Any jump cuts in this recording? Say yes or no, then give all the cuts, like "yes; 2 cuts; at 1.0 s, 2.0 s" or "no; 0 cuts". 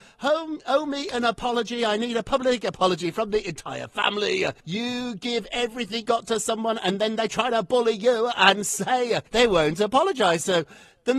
yes; 3 cuts; at 4.6 s, 6.0 s, 9.3 s